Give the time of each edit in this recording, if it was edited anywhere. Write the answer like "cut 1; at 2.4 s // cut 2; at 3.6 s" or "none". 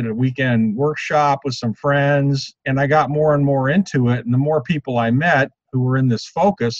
cut 1; at 2.6 s